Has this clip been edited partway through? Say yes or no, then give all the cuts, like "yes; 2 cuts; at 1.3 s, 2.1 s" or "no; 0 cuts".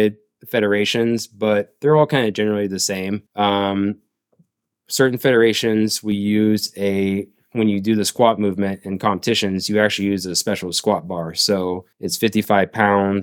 yes; 2 cuts; at 3.3 s, 11.9 s